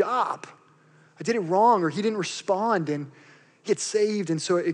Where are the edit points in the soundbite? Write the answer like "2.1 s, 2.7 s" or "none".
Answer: 3.7 s